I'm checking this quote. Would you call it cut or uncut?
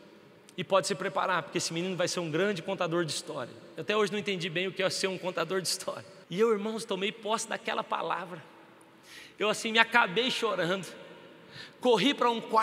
cut